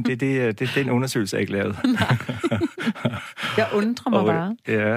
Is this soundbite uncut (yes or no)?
yes